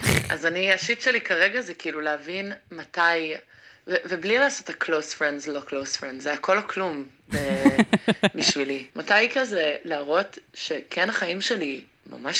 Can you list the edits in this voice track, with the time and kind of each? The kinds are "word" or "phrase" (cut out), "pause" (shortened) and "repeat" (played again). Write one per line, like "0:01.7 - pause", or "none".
0:06.2 - word
0:08.9 - pause